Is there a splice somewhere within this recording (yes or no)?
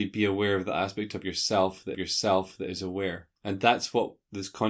yes